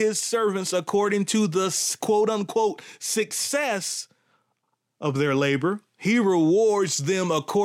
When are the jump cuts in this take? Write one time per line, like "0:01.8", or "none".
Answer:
none